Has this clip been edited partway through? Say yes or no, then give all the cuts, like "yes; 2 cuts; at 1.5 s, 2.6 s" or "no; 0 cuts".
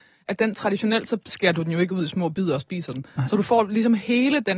no; 0 cuts